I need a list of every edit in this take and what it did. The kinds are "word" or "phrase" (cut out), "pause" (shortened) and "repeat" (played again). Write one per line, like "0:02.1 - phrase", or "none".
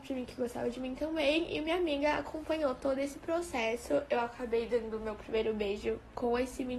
none